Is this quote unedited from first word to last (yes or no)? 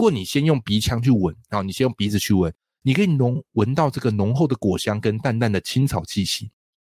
yes